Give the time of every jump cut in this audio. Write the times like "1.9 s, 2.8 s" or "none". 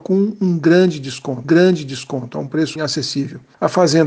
1.4 s, 2.8 s